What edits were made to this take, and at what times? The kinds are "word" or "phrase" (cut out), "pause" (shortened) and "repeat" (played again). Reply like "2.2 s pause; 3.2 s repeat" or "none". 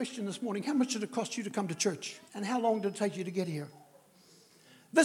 2.3 s pause